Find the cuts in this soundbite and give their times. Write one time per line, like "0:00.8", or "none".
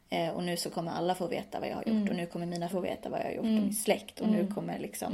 0:02.7

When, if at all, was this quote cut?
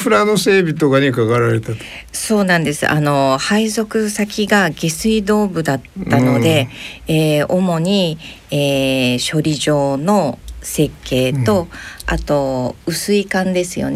none

